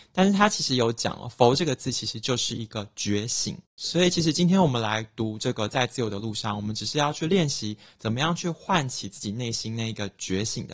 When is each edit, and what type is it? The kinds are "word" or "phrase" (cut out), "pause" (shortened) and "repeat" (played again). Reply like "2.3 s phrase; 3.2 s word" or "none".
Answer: 3.7 s pause